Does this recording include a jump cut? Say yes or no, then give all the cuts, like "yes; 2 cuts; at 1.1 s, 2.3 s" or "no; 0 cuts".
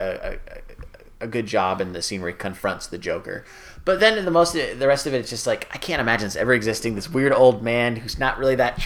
no; 0 cuts